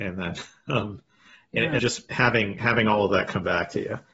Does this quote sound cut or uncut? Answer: cut